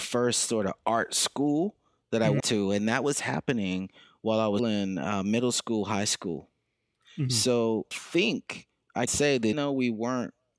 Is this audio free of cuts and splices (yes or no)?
no